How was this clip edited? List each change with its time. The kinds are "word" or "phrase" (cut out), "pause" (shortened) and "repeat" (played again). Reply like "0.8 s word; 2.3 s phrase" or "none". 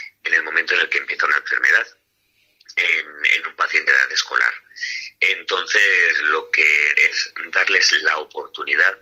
3.9 s word; 6.9 s phrase